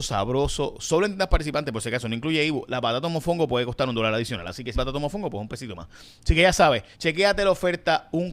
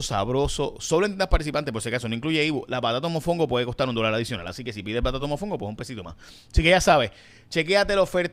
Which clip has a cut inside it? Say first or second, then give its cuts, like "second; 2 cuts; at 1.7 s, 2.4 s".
first; 2 cuts; at 4.7 s, 6.9 s